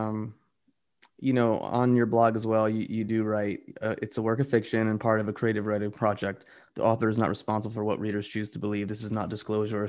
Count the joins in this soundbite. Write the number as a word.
zero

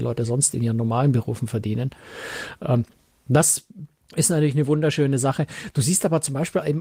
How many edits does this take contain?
one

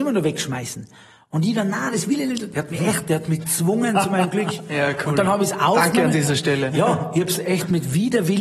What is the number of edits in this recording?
zero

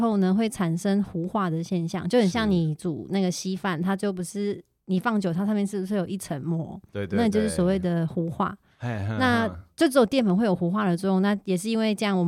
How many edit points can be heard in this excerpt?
zero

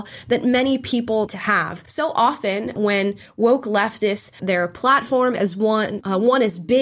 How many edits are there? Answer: three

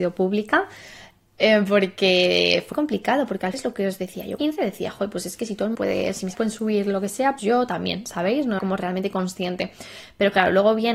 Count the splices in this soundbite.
seven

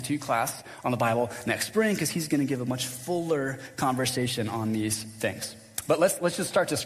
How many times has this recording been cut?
zero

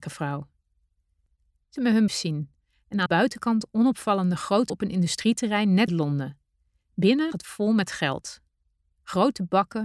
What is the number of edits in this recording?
six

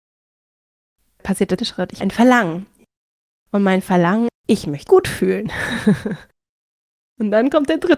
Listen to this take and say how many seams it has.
four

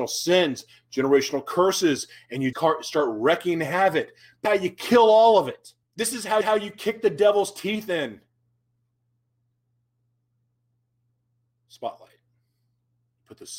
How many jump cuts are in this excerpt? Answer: four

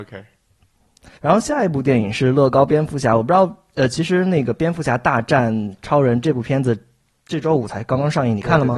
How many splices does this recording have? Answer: one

